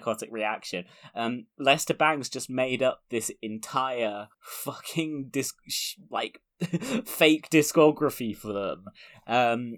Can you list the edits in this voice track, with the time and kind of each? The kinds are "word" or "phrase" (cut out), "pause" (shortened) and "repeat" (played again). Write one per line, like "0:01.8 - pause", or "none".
0:04.3 - pause